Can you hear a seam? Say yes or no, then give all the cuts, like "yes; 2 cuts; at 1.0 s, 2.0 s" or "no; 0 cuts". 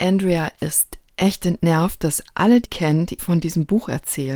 yes; 2 cuts; at 2.6 s, 3.2 s